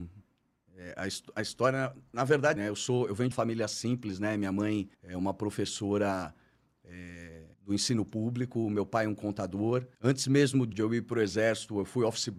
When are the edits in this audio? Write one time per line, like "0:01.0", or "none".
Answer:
0:02.6
0:03.3
0:04.9
0:07.5
0:09.9
0:10.7